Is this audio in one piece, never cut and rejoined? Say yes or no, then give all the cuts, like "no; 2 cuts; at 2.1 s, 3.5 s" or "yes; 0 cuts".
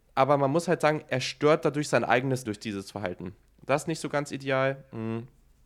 no; 1 cut; at 2.5 s